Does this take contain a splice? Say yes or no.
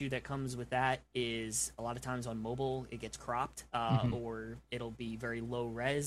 yes